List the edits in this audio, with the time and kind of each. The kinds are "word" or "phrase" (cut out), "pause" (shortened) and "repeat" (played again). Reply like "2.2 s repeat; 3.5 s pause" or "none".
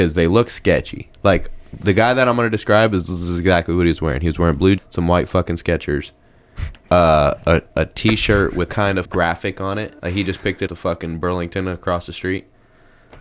4.8 s word; 6.8 s pause; 8.7 s word; 9.0 s word; 10.0 s pause; 10.7 s phrase